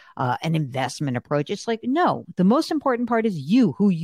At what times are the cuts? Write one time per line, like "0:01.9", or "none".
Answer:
none

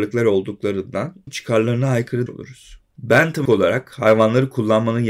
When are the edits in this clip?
0:01.3
0:02.3
0:03.5

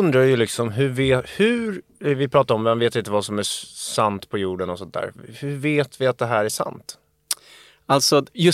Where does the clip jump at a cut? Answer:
none

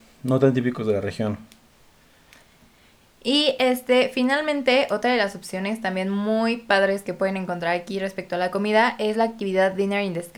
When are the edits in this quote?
none

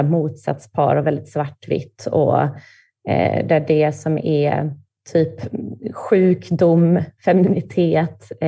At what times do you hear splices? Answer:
none

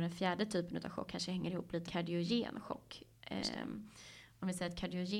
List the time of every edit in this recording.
0:01.1
0:01.9

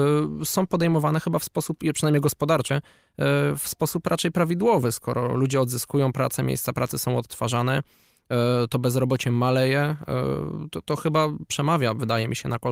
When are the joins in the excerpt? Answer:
0:02.7

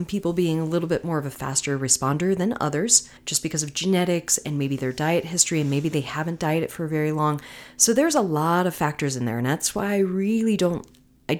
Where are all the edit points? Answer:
0:03.2

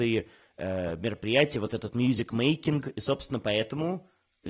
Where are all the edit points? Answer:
none

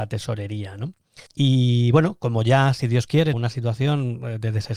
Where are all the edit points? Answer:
0:01.3
0:03.3

